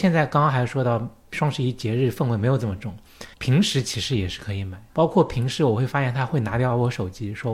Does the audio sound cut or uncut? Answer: cut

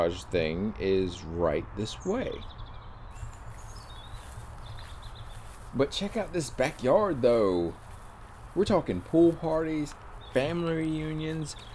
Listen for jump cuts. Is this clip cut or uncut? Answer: uncut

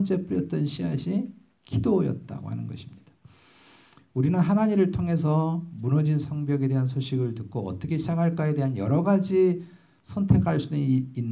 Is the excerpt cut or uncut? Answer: uncut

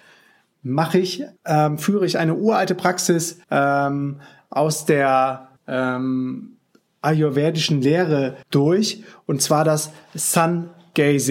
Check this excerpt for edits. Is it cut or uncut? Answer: cut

